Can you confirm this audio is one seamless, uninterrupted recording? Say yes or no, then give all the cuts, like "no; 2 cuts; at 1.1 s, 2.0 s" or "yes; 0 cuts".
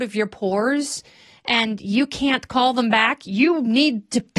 yes; 0 cuts